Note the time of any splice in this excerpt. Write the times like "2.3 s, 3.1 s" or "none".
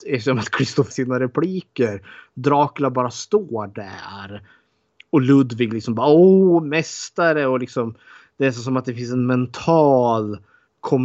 0.9 s